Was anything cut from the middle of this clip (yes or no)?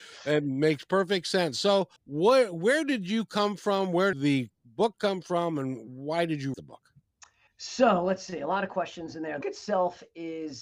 yes